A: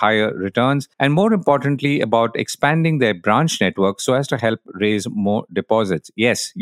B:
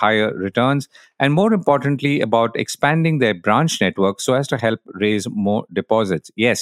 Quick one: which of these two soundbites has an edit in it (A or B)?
A